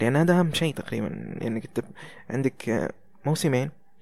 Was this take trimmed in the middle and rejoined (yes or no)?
no